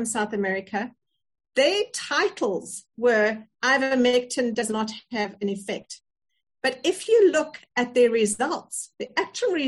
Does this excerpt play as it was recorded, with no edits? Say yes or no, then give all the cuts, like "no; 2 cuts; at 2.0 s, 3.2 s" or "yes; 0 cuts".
yes; 0 cuts